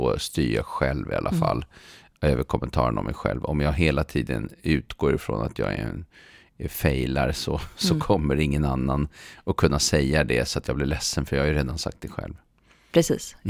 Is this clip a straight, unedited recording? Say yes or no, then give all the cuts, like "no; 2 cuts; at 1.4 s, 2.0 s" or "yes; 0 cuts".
yes; 0 cuts